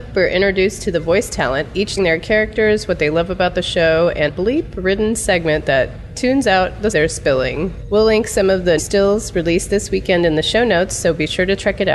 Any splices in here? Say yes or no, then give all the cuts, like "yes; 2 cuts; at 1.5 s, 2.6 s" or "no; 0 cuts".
yes; 4 cuts; at 2.0 s, 4.3 s, 6.9 s, 8.8 s